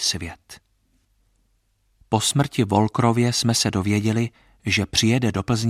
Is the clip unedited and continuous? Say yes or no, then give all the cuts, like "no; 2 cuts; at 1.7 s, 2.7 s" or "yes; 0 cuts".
yes; 0 cuts